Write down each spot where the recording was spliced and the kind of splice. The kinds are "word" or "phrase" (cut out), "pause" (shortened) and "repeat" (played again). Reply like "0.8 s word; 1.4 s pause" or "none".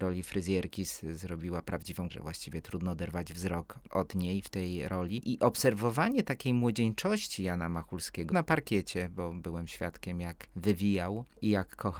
2.1 s word; 8.3 s word